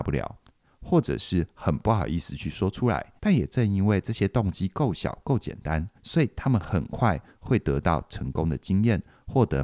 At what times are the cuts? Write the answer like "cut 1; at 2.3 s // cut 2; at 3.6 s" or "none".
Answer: cut 1; at 3.2 s // cut 2; at 6.0 s

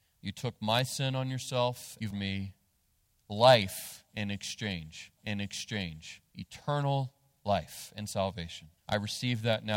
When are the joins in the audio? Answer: cut 1; at 2.1 s // cut 2; at 5.2 s // cut 3; at 8.8 s

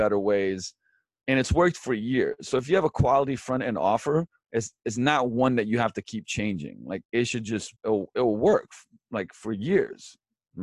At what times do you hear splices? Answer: cut 1; at 7.1 s // cut 2; at 7.8 s

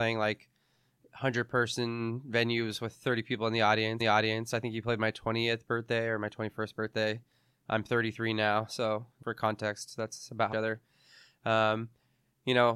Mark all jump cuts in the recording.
cut 1; at 4.0 s // cut 2; at 9.2 s // cut 3; at 10.5 s

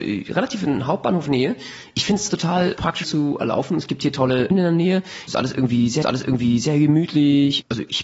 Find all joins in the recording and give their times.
cut 1; at 2.3 s // cut 2; at 3.0 s // cut 3; at 4.5 s // cut 4; at 6.0 s

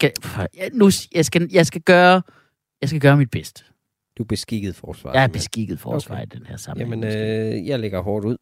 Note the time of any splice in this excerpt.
none

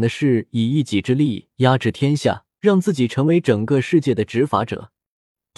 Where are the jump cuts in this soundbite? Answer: cut 1; at 2.5 s

